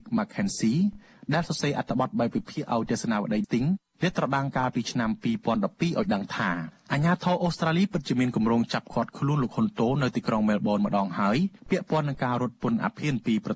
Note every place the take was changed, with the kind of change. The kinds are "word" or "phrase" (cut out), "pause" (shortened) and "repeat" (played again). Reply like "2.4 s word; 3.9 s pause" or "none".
3.4 s word; 11.6 s pause